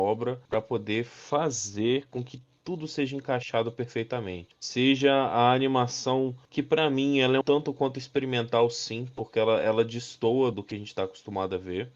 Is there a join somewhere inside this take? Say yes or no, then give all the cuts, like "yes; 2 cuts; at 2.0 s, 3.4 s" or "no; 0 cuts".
yes; 2 cuts; at 7.4 s, 10.5 s